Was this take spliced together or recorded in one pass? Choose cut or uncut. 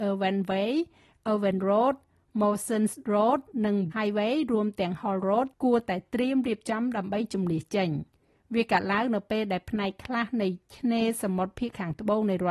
cut